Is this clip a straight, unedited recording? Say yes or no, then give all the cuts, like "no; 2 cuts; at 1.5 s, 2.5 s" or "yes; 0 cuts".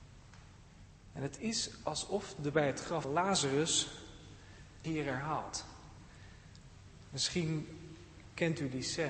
no; 3 cuts; at 2.5 s, 3.0 s, 4.8 s